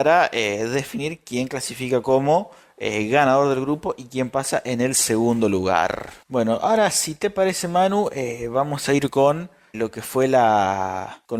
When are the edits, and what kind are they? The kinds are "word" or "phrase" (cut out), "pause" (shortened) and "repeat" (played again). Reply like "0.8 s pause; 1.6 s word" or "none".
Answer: 9.7 s word